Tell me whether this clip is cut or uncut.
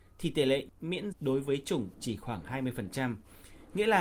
cut